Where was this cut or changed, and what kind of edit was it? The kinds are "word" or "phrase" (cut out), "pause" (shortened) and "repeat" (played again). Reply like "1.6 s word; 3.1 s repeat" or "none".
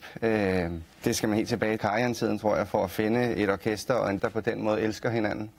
0.9 s pause; 1.8 s word; 4.2 s word